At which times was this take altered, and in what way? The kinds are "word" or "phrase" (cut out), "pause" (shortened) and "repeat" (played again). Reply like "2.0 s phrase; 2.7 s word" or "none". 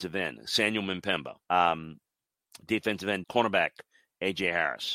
1.4 s pause; 3.2 s phrase